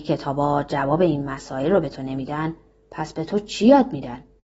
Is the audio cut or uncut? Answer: uncut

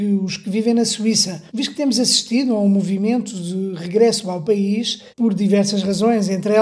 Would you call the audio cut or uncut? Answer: cut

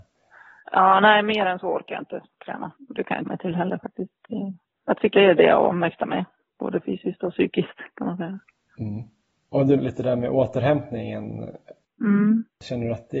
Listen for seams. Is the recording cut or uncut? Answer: cut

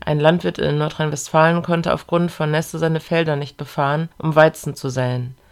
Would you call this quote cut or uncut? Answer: cut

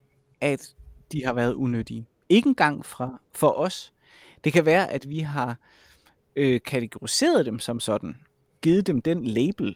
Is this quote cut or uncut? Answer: uncut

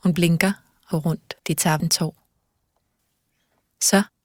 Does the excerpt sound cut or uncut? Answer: cut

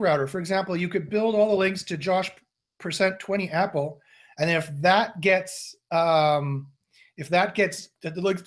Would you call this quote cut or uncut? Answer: uncut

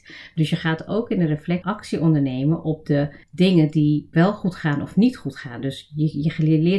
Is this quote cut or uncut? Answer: cut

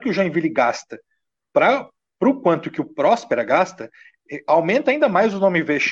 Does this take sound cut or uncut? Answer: uncut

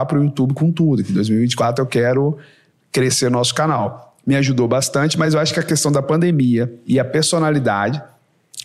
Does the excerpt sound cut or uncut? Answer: uncut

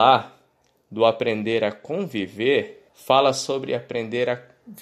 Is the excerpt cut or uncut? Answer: cut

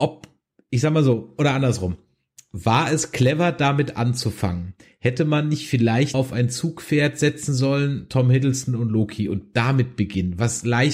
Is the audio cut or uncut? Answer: cut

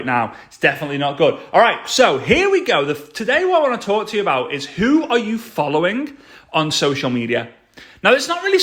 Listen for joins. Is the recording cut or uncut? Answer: uncut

